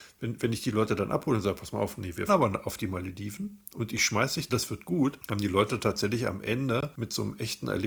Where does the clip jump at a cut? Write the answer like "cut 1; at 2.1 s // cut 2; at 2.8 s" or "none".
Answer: cut 1; at 2.3 s // cut 2; at 4.5 s